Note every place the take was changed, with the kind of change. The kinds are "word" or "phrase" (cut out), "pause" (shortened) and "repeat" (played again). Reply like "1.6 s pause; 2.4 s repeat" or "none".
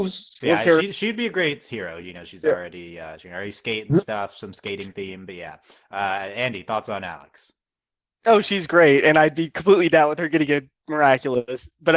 none

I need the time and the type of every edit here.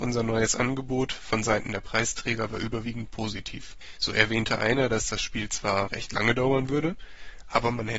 none

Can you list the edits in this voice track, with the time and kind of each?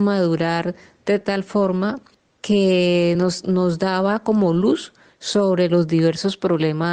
none

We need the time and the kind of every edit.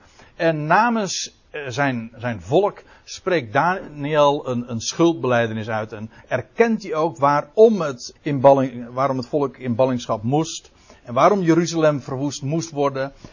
8.2 s word

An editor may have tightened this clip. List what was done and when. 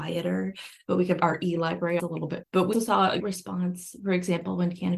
1.2 s word; 2.0 s word; 2.4 s word; 2.7 s word; 3.2 s word

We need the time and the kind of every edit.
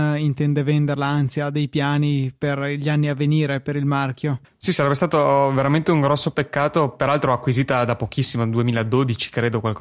4.4 s pause

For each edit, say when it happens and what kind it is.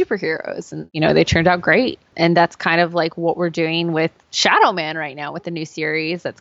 2.1 s pause

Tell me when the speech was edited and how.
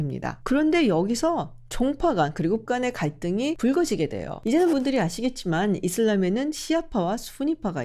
2.6 s word; 4.7 s word

